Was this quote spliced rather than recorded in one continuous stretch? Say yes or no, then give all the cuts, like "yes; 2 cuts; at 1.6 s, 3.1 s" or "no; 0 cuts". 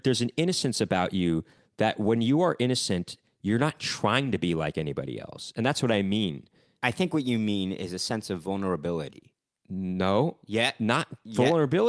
no; 0 cuts